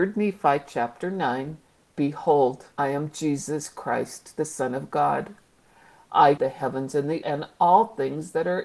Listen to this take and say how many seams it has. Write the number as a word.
three